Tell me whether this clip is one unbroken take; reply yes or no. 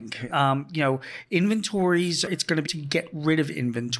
no